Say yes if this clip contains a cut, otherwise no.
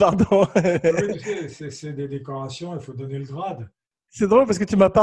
no